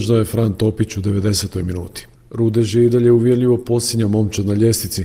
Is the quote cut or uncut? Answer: uncut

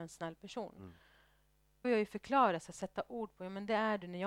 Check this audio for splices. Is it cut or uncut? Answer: cut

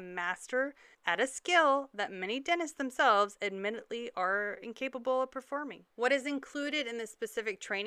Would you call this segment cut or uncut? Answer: cut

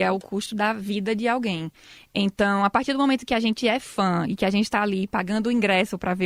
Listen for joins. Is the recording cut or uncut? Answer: uncut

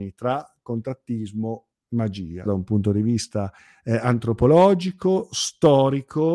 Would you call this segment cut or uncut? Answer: cut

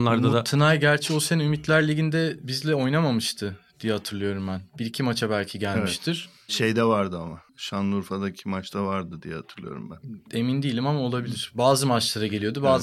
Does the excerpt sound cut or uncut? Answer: cut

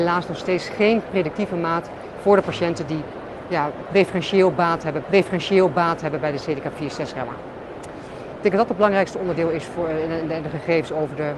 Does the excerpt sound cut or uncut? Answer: cut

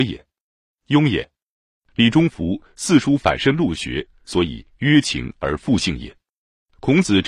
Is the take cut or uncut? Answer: uncut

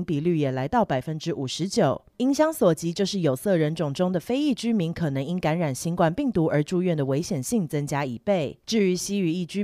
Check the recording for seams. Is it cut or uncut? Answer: uncut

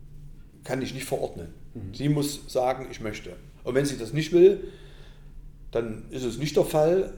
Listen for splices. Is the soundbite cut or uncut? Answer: cut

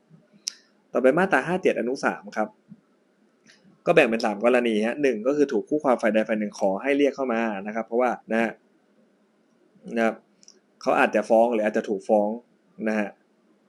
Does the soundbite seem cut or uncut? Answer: cut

